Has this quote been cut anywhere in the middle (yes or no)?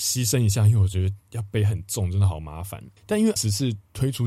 yes